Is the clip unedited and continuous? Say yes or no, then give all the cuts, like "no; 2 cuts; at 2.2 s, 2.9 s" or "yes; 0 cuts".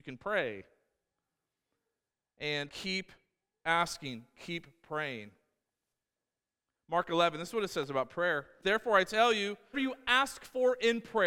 no; 3 cuts; at 2.7 s, 8.6 s, 9.7 s